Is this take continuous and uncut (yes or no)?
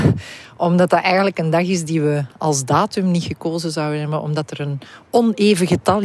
yes